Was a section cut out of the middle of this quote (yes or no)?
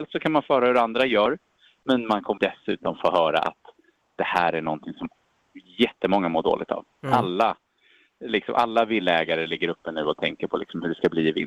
yes